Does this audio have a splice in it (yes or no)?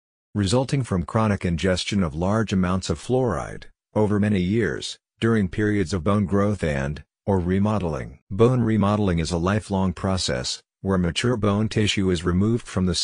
yes